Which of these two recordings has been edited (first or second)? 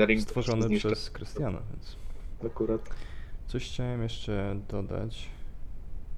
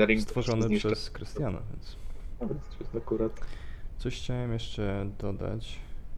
first